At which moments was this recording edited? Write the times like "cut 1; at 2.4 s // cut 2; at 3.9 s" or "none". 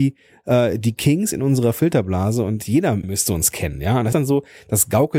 cut 1; at 3.0 s // cut 2; at 4.1 s